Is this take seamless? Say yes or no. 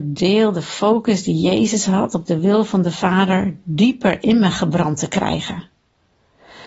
yes